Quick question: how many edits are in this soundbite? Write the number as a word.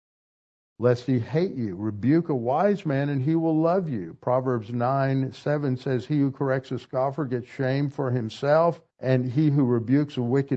one